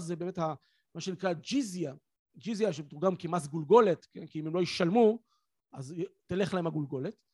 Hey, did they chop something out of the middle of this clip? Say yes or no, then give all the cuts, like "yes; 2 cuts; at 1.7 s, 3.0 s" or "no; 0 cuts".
no; 0 cuts